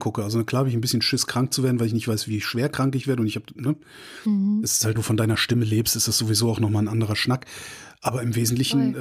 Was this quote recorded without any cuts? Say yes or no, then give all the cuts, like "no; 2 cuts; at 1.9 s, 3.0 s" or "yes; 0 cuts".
no; 1 cut; at 4.9 s